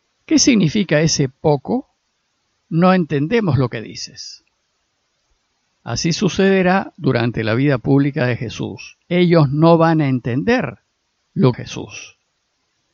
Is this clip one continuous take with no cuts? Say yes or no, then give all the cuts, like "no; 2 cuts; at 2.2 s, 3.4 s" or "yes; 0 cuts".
no; 2 cuts; at 9.0 s, 11.5 s